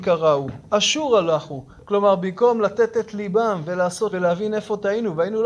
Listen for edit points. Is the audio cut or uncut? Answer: cut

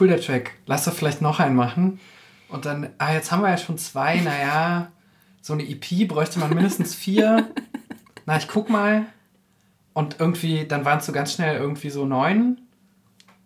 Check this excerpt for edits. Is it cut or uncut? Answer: uncut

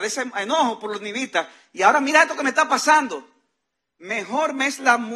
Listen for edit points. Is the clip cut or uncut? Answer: uncut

